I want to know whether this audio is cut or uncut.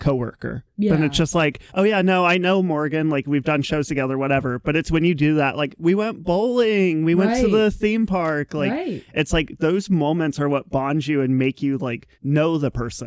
cut